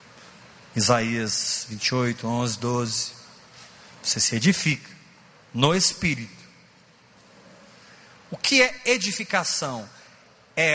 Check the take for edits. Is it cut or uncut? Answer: uncut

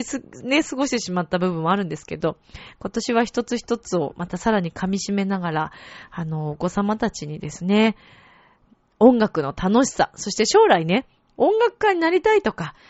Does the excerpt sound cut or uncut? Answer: uncut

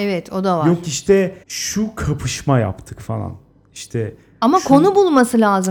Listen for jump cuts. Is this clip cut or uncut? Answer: cut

